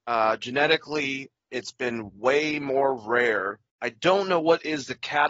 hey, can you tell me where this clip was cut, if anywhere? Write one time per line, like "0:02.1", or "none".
0:03.7